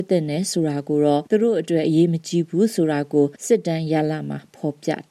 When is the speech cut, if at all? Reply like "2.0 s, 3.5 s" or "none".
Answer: 1.3 s, 3.4 s